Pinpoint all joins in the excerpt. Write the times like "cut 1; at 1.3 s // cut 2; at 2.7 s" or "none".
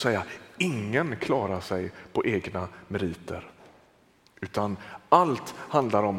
none